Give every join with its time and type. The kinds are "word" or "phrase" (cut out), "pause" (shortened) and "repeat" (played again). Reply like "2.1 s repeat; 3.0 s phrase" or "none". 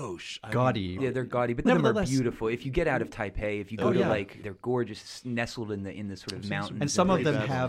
1.0 s phrase; 1.6 s word; 4.4 s word